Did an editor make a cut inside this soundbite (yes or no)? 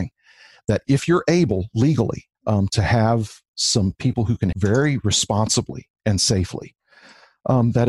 yes